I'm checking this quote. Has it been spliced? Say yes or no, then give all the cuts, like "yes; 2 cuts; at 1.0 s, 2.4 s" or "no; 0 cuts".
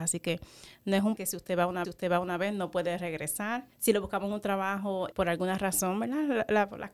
yes; 4 cuts; at 1.2 s, 1.8 s, 3.7 s, 5.1 s